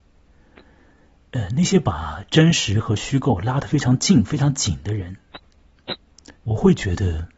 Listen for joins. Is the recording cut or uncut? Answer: cut